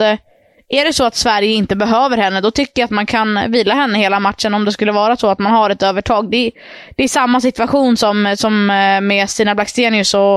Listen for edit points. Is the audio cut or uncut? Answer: uncut